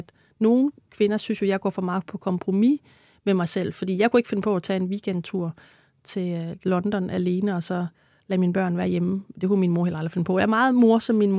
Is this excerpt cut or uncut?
uncut